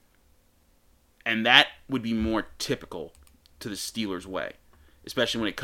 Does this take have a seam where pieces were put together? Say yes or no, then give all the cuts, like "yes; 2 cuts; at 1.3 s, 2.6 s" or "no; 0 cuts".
no; 0 cuts